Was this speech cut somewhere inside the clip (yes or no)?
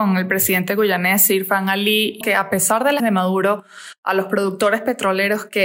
yes